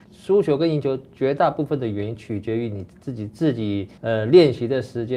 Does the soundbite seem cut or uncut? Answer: cut